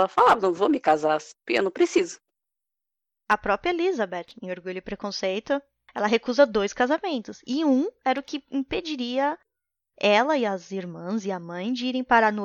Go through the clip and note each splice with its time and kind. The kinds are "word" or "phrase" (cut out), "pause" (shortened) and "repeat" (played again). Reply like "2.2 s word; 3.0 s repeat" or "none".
none